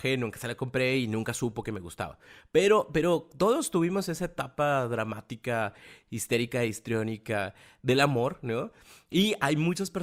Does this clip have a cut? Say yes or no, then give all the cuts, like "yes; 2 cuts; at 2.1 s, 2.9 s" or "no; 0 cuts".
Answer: no; 0 cuts